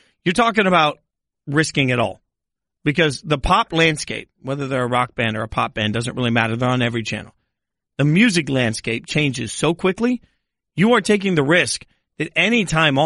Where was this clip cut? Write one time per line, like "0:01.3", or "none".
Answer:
none